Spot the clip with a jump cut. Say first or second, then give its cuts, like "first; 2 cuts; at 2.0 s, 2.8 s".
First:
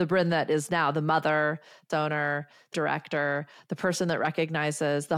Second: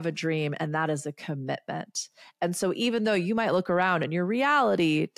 first; 2 cuts; at 1.9 s, 2.7 s